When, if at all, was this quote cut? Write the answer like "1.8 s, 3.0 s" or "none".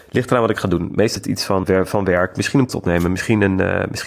1.2 s, 1.6 s, 2.7 s